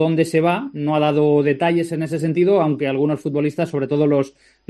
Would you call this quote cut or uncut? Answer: uncut